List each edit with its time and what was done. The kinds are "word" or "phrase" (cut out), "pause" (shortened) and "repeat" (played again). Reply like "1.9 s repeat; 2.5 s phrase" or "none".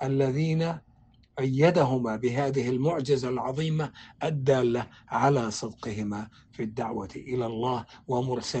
none